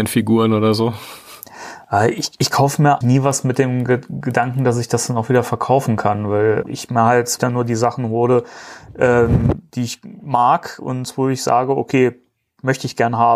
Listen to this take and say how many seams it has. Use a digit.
3